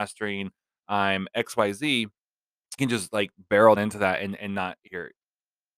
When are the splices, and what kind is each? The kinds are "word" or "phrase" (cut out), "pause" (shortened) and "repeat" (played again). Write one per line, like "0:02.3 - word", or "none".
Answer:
0:02.8 - word
0:03.8 - word
0:04.9 - word